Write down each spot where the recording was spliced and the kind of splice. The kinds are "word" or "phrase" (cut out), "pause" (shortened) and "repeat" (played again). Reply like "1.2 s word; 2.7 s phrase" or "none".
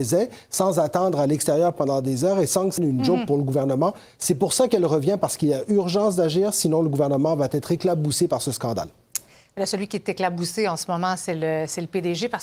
2.8 s word